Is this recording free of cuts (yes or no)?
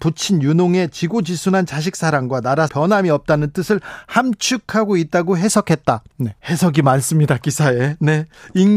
no